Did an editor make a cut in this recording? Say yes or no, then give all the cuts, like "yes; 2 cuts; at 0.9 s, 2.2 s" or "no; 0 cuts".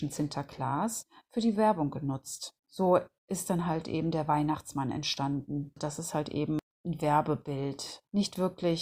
yes; 1 cut; at 2.6 s